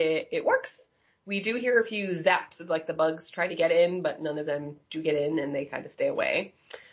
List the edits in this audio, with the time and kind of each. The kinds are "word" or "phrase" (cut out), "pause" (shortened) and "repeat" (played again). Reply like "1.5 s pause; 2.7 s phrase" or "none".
none